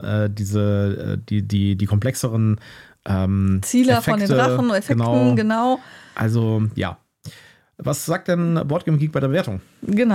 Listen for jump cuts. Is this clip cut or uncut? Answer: uncut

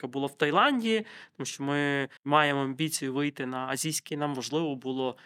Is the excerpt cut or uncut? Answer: cut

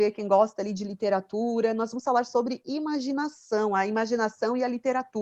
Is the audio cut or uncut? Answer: uncut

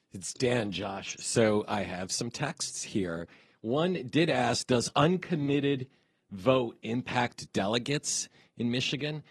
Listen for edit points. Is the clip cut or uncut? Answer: uncut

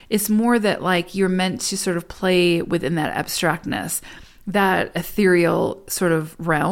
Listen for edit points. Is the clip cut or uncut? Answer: uncut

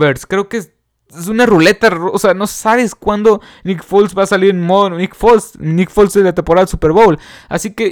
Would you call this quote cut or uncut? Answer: uncut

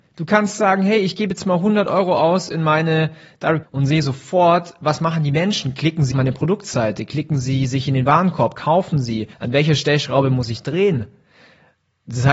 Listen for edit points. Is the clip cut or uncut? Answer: cut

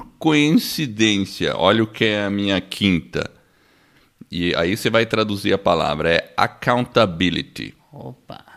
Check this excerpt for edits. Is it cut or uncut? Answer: uncut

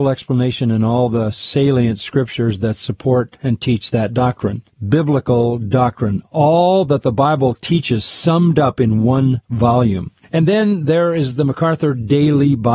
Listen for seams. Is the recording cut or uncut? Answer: cut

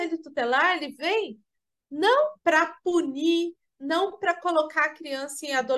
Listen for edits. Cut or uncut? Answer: cut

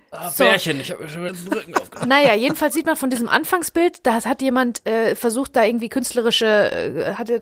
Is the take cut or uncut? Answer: cut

